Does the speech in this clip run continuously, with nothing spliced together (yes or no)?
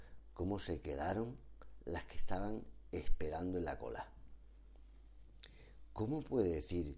yes